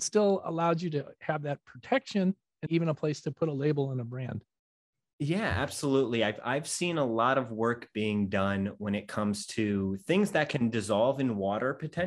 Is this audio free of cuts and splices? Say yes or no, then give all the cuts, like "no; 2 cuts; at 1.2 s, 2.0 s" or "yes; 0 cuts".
no; 1 cut; at 2.7 s